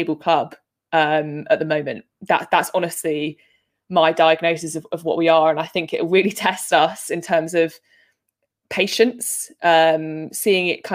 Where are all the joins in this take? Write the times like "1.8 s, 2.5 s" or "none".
none